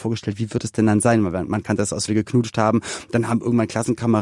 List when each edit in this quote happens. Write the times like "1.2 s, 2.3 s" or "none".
2.1 s